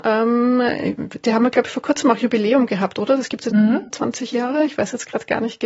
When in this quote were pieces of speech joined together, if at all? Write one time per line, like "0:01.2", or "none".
0:03.5